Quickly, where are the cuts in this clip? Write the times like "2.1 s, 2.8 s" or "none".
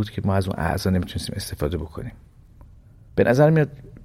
none